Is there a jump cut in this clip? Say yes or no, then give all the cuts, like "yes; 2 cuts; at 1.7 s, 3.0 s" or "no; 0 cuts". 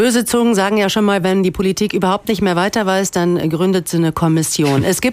no; 0 cuts